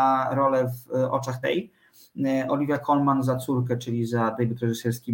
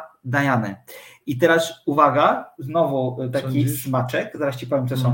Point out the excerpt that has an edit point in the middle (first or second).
first